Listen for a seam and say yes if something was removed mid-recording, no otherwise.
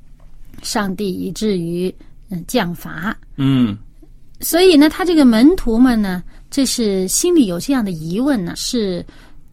yes